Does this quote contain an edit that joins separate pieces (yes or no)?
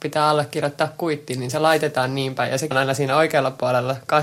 yes